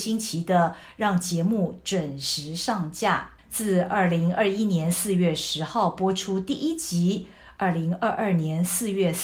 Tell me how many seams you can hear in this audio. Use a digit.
1